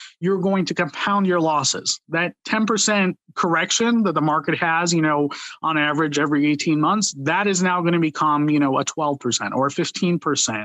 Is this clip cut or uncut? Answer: uncut